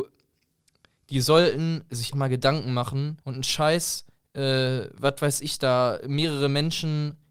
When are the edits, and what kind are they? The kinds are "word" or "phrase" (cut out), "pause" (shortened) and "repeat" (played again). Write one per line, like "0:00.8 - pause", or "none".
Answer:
0:02.1 - word
0:03.2 - pause
0:04.1 - pause